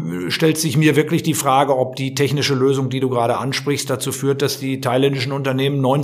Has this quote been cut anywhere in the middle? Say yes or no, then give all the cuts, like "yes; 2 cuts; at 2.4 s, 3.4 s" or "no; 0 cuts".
no; 0 cuts